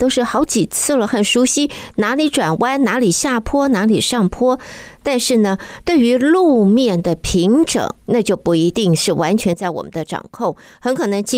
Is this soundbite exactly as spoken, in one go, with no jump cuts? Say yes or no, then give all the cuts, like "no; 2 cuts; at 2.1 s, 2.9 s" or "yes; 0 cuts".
no; 1 cut; at 8.0 s